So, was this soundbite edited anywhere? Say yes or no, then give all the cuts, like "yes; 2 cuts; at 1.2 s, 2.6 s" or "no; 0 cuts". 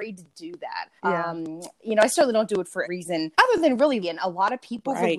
yes; 5 cuts; at 1.0 s, 1.8 s, 2.8 s, 3.3 s, 4.0 s